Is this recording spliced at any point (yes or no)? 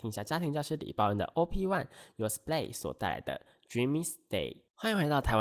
no